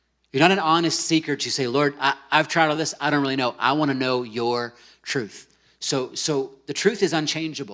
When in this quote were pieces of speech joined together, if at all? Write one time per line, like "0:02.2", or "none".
none